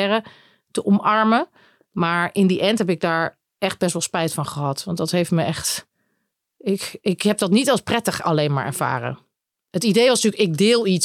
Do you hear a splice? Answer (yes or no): no